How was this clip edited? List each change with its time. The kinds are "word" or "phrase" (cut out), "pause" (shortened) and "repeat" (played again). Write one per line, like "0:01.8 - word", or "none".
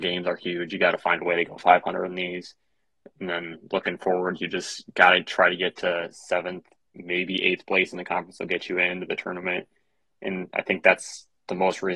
none